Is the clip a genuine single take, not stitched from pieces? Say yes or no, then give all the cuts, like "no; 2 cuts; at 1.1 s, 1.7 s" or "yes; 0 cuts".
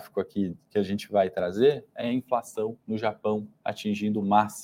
no; 1 cut; at 2.8 s